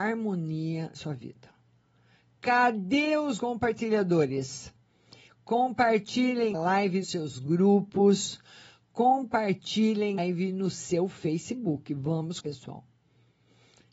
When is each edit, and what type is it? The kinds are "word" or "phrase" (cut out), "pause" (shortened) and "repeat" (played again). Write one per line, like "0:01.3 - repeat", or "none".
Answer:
0:00.9 - word
0:03.4 - word
0:06.5 - word
0:07.0 - word
0:10.2 - word
0:12.4 - word